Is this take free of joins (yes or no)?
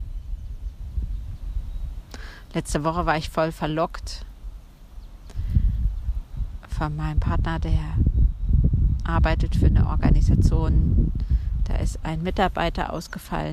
yes